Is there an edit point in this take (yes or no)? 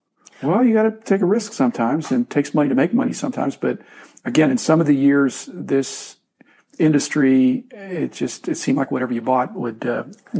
no